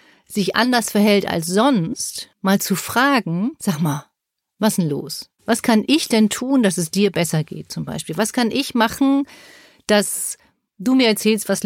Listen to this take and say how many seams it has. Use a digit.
0